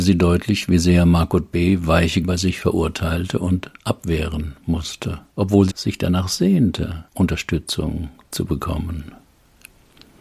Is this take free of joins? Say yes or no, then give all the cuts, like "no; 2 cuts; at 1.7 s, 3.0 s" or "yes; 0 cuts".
no; 4 cuts; at 2.2 s, 5.3 s, 5.7 s, 7.1 s